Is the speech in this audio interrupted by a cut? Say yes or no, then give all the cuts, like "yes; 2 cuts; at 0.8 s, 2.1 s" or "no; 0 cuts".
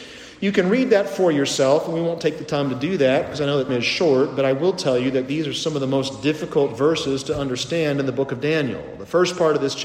yes; 1 cut; at 3.7 s